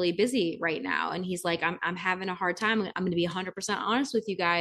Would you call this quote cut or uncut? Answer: uncut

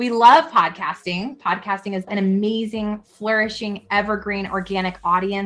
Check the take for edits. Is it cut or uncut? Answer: cut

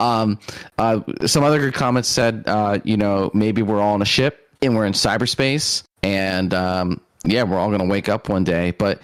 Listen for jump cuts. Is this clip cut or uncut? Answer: cut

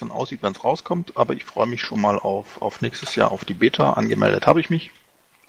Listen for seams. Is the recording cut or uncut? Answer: uncut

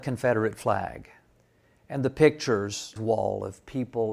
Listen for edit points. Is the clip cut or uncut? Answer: cut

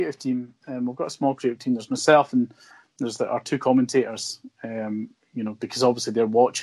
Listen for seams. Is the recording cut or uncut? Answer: uncut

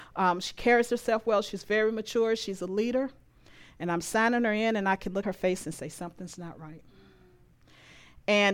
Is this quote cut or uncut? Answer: cut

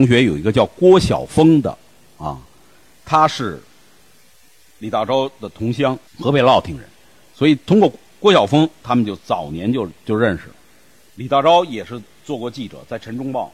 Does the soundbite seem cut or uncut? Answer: cut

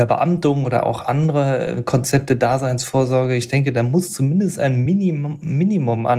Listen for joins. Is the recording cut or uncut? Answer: uncut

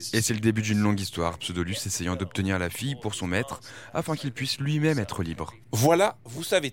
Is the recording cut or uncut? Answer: cut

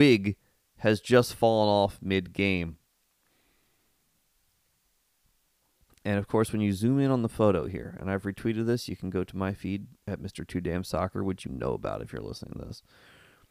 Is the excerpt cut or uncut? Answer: uncut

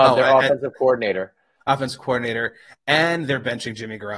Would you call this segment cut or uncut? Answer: uncut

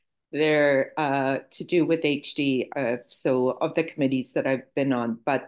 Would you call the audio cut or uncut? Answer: uncut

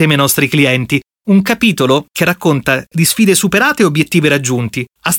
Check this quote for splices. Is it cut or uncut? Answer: uncut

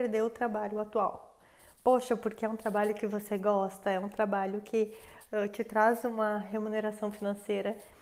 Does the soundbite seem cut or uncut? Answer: uncut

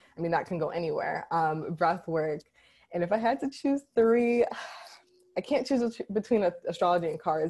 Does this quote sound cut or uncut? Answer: uncut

